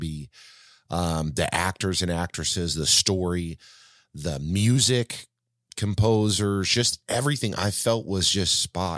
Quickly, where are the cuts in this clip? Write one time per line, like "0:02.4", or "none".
none

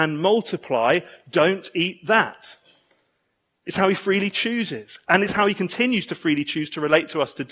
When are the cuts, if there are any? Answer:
none

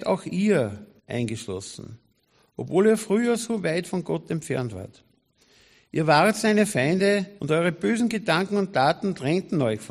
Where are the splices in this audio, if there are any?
0:01.0
0:07.4

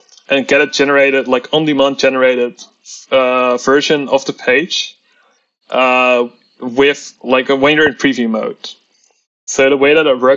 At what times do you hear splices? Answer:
none

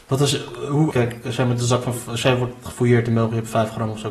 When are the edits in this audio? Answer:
0:00.9

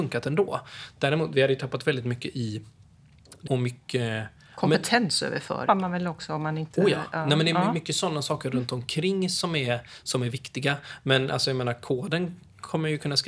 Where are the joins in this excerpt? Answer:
0:03.5
0:05.7

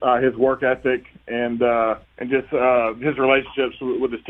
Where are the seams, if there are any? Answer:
0:02.0

